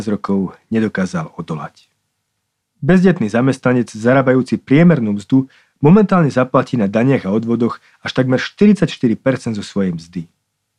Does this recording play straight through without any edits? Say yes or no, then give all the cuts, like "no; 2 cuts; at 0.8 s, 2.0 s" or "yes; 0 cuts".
yes; 0 cuts